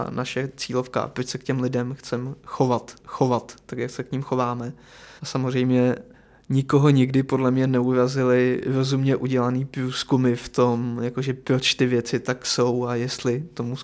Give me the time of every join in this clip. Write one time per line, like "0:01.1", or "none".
0:03.0
0:05.2
0:06.1